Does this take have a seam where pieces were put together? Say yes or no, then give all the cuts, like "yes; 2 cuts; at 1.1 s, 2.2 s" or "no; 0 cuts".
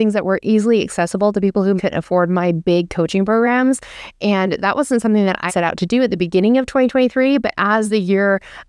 yes; 2 cuts; at 1.8 s, 5.5 s